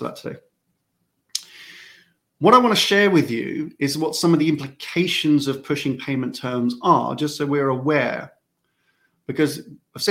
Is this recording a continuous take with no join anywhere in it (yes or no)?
yes